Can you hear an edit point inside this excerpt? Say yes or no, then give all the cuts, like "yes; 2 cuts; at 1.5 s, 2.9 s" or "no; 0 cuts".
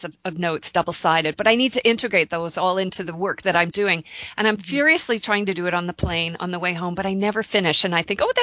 no; 0 cuts